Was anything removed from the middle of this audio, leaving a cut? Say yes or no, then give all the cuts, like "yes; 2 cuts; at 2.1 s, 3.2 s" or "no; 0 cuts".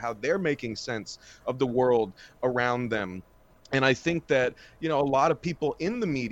no; 0 cuts